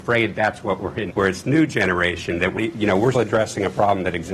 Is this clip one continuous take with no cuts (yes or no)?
no